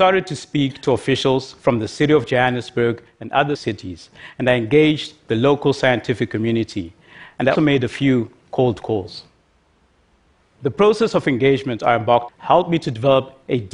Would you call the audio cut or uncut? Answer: cut